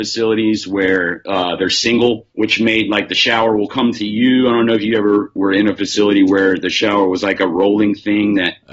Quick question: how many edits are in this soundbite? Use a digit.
1